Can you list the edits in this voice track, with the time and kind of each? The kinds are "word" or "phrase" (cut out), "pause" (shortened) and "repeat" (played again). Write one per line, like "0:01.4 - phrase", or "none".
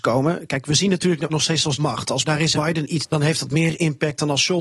0:01.3 - word
0:01.8 - word
0:02.2 - word
0:02.5 - word
0:03.0 - word

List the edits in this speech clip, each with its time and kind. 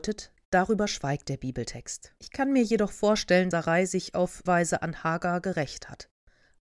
0:02.2 - pause
0:03.5 - word
0:04.5 - word

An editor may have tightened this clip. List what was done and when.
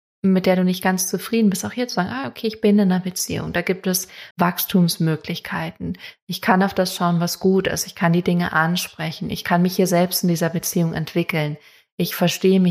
0:04.3 - pause

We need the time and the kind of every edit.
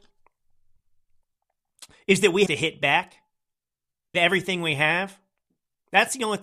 0:02.5 - word
0:04.1 - word

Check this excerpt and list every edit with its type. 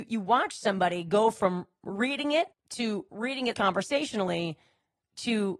0:02.5 - pause
0:03.5 - word

